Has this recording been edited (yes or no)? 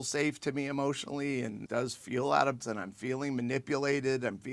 yes